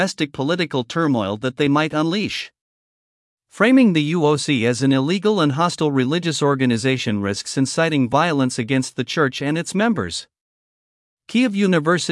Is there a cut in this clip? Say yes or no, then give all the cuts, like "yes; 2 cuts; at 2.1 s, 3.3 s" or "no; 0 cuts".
no; 0 cuts